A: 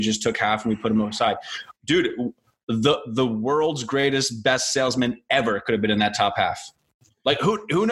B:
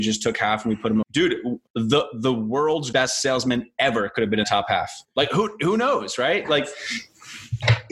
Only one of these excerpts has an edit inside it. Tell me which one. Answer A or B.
B